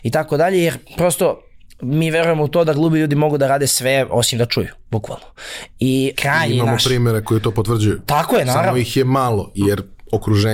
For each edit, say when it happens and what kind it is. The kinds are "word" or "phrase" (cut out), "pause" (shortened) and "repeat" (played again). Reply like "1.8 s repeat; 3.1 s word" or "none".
6.2 s word